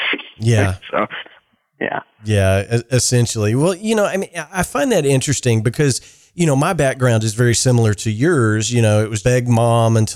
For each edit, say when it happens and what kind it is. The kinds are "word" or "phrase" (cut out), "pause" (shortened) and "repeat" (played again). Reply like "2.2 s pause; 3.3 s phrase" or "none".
9.2 s word